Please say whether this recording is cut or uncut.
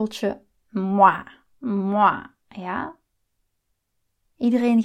uncut